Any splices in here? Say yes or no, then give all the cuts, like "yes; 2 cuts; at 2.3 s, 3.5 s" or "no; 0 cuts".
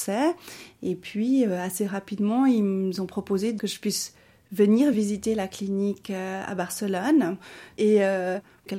no; 0 cuts